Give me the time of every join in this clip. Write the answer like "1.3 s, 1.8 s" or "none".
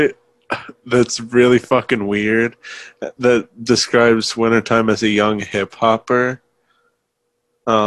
none